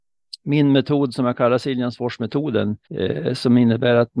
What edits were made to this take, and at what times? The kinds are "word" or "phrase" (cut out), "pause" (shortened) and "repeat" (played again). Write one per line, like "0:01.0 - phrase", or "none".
0:02.8 - pause